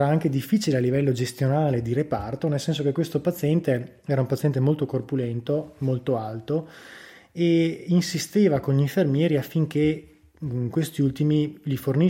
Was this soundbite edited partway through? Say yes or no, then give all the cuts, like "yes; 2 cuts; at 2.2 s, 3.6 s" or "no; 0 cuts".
no; 0 cuts